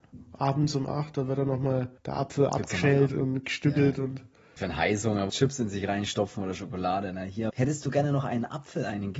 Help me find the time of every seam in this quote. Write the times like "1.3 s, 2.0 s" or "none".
2.0 s, 3.1 s, 4.6 s, 5.3 s, 7.5 s